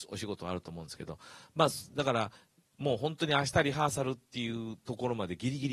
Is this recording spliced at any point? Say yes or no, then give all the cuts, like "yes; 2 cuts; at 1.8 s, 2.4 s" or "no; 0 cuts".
no; 0 cuts